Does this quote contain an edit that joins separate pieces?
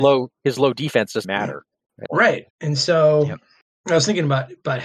yes; 3 cuts; at 1.2 s, 2.1 s, 2.5 s

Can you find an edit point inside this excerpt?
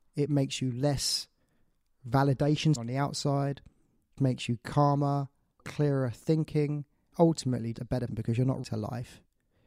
yes; 7 cuts; at 2.8 s, 4.2 s, 5.6 s, 7.1 s, 7.7 s, 8.1 s, 8.6 s

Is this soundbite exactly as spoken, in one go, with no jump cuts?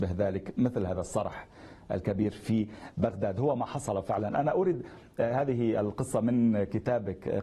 yes; 0 cuts

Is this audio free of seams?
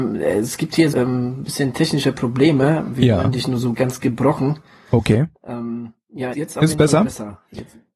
no; 3 cuts; at 0.9 s, 3.7 s, 6.3 s

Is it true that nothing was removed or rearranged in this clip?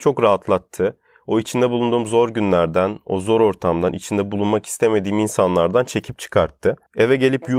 yes; 0 cuts

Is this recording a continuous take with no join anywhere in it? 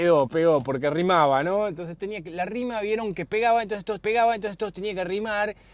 no; 2 cuts; at 2.0 s, 4.0 s

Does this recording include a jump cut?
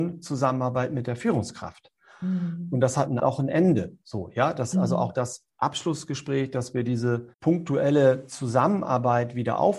yes; 3 cuts; at 3.2 s, 4.7 s, 7.3 s

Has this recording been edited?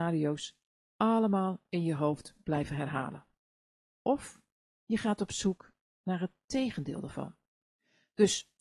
no; 0 cuts

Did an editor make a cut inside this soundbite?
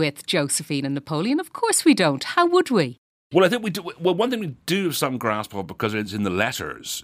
no; 0 cuts

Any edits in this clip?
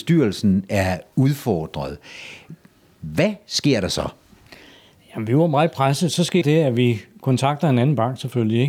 yes; 1 cut; at 6.4 s

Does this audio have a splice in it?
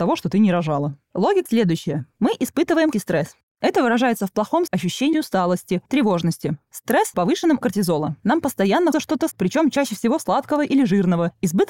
yes; 9 cuts; at 1.5 s, 2.9 s, 4.7 s, 5.1 s, 5.9 s, 7.1 s, 7.6 s, 8.9 s, 9.3 s

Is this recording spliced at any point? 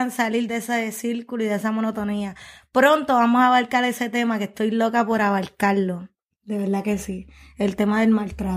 no; 0 cuts

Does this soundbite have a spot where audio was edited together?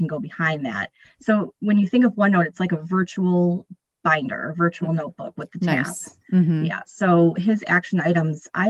no; 0 cuts

